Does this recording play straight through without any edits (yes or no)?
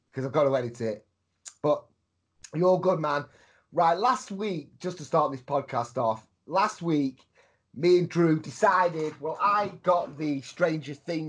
yes